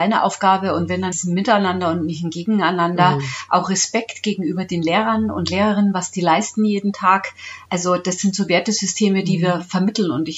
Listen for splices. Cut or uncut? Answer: cut